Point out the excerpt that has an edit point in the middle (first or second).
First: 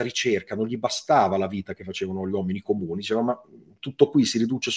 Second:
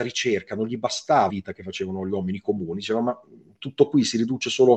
second